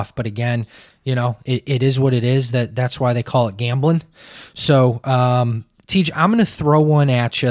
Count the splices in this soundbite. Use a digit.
0